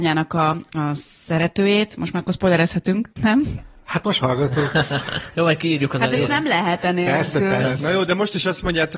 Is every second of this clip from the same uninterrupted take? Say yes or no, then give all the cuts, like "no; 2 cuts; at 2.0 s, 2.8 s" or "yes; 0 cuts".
no; 3 cuts; at 3.1 s, 4.2 s, 7.6 s